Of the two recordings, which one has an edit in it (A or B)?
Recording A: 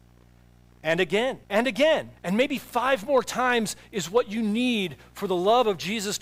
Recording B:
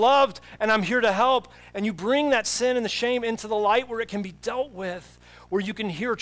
A